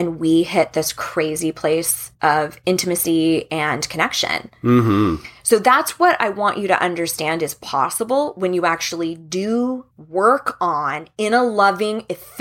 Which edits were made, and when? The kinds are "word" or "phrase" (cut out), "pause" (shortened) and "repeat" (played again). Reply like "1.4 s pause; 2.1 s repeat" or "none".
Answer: 2.1 s pause; 9.9 s pause